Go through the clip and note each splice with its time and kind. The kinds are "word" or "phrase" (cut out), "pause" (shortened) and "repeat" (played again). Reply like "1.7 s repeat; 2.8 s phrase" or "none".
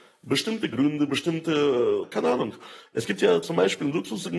2.0 s phrase